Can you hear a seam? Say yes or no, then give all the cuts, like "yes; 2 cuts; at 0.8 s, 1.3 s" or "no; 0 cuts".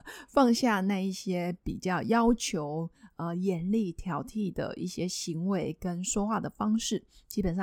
no; 0 cuts